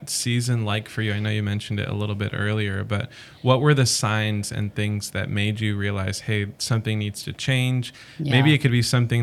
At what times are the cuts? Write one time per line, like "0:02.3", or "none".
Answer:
none